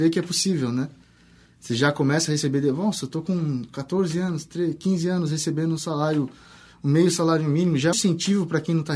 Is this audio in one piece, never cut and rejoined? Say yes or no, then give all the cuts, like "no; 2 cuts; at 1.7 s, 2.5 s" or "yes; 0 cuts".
no; 1 cut; at 7.9 s